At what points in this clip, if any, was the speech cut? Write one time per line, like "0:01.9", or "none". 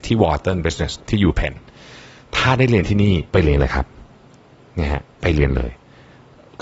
0:01.0
0:03.3